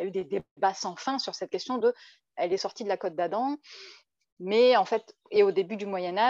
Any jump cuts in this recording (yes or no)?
no